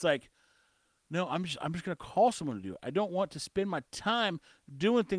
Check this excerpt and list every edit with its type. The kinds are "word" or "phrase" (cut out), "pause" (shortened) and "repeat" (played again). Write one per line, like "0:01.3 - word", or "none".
none